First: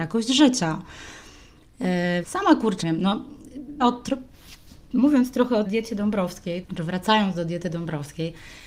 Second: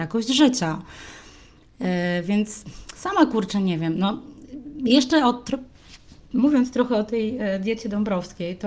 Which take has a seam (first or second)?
first